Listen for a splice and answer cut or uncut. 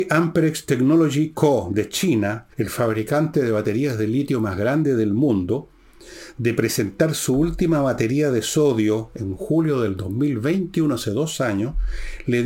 cut